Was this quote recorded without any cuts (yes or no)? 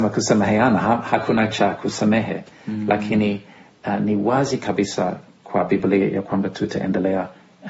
yes